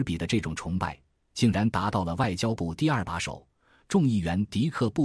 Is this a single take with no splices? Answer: yes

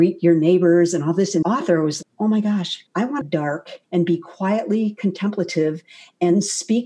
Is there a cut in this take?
yes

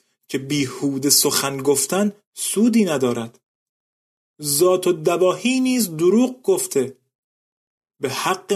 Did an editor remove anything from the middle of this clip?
no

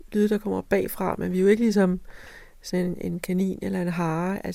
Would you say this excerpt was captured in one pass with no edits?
yes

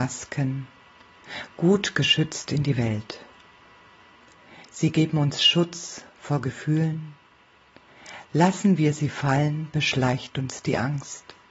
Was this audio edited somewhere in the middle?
no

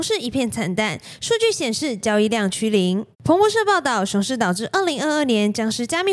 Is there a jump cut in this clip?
yes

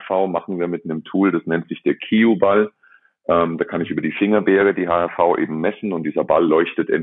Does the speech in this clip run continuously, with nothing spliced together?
yes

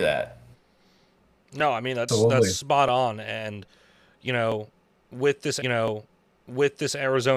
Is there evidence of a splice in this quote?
yes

